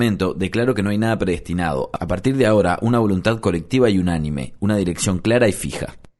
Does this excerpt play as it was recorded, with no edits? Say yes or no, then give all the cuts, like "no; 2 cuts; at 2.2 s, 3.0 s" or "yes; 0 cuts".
yes; 0 cuts